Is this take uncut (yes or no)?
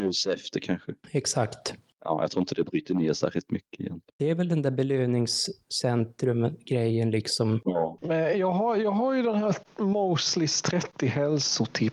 no